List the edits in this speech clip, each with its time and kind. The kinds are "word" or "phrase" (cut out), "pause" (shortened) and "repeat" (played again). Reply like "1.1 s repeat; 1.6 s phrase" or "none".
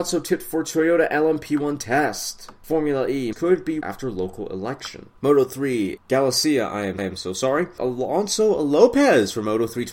3.3 s phrase; 3.8 s word; 5.2 s pause; 6.0 s word; 7.0 s repeat; 7.8 s word

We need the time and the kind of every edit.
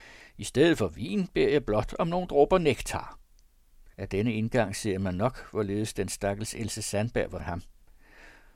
3.9 s pause; 7.4 s word

